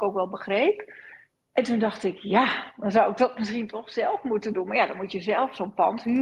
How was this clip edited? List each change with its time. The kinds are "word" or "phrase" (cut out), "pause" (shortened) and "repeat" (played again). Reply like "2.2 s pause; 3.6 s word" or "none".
none